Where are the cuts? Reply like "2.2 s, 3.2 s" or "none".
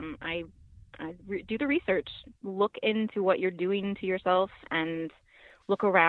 2.4 s